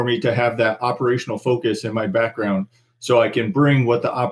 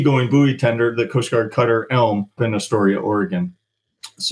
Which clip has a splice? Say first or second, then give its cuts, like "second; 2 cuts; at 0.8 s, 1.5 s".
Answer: second; 1 cut; at 2.4 s